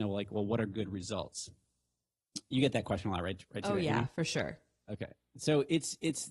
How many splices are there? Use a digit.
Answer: 0